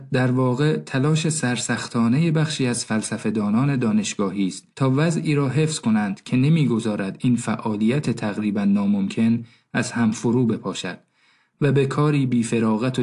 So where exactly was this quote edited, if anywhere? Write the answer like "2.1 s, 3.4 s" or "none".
4.7 s